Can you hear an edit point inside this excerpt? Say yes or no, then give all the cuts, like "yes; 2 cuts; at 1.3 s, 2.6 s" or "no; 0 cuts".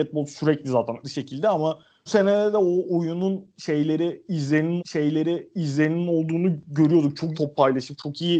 yes; 4 cuts; at 1.0 s, 2.1 s, 4.8 s, 7.3 s